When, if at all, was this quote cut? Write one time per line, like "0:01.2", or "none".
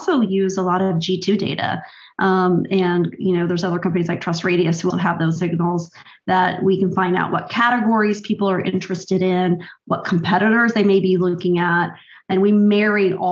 0:04.9
0:05.4